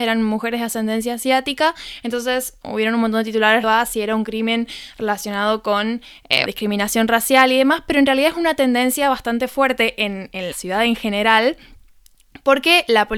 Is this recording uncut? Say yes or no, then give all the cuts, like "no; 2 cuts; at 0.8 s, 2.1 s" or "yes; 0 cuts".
no; 4 cuts; at 2.6 s, 3.6 s, 6.5 s, 10.5 s